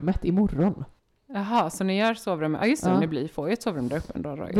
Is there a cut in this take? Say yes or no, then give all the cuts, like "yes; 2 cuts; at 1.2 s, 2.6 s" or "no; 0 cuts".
no; 0 cuts